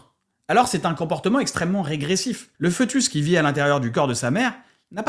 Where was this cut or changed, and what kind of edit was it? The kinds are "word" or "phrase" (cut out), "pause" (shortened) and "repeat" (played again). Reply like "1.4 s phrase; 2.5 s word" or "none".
2.5 s pause